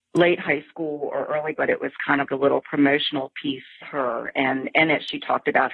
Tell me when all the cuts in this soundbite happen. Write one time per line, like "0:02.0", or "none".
0:01.5
0:02.3
0:03.8